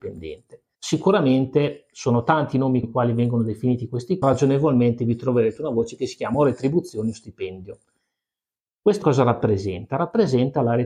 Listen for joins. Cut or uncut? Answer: cut